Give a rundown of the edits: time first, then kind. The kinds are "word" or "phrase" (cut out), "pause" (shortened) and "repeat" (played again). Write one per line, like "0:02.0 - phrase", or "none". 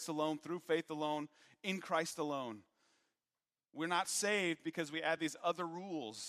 none